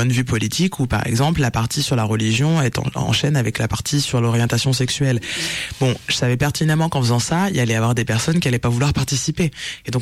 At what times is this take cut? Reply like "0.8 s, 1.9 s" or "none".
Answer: none